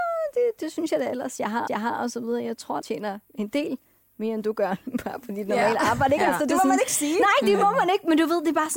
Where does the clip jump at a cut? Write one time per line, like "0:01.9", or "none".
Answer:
0:01.7
0:02.8
0:03.2